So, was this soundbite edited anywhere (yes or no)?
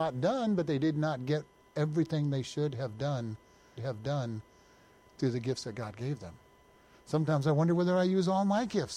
yes